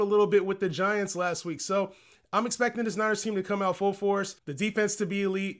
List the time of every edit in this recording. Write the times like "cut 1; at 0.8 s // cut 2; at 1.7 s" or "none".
cut 1; at 4.4 s

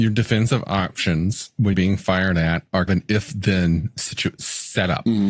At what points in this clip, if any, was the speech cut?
cut 1; at 1.7 s // cut 2; at 2.9 s

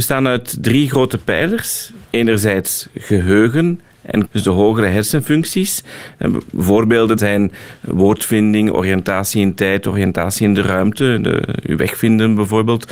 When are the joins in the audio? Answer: cut 1; at 2.0 s // cut 2; at 4.3 s // cut 3; at 7.2 s

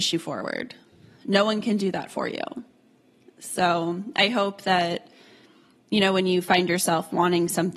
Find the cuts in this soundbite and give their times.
none

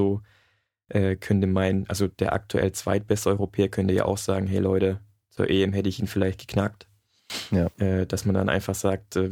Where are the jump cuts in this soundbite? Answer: none

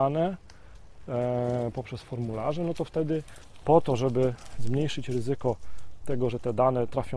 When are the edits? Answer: none

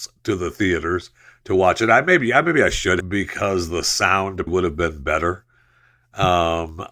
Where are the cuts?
cut 1; at 3.0 s // cut 2; at 4.5 s

